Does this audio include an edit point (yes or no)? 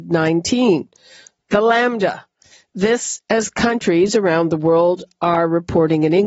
no